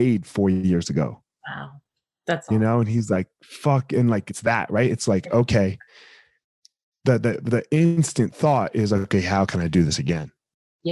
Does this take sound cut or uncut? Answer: uncut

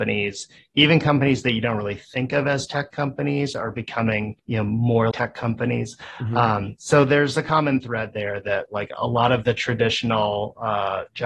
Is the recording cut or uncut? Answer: cut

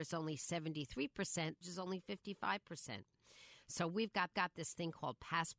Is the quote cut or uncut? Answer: cut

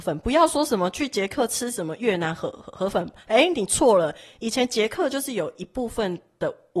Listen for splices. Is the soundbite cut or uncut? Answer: uncut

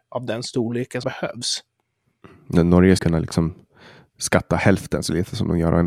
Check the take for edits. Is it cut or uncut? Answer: cut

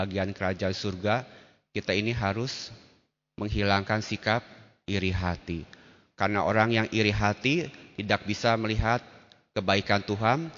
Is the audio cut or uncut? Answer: uncut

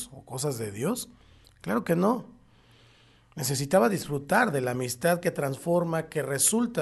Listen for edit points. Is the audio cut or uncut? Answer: uncut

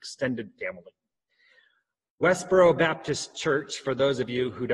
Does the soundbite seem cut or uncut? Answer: uncut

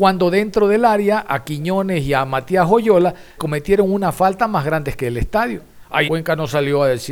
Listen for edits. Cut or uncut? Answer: cut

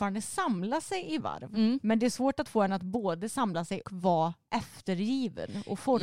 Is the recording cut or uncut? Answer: cut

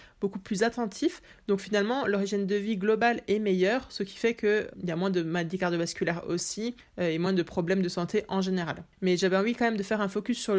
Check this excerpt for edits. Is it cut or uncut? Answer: uncut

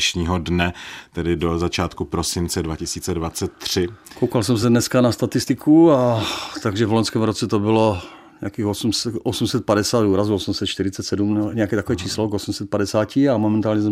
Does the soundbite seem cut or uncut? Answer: uncut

